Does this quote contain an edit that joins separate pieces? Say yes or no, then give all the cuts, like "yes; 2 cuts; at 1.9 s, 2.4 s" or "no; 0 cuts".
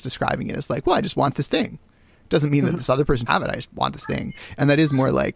yes; 1 cut; at 3.3 s